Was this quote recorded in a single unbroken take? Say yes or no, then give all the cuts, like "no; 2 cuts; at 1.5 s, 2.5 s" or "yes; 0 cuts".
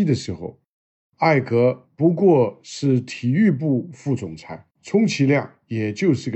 no; 1 cut; at 4.7 s